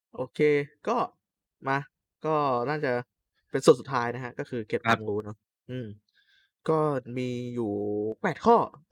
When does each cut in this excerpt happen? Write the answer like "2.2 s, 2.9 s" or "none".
2.1 s